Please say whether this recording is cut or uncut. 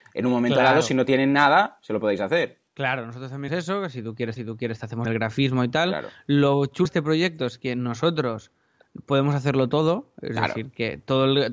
cut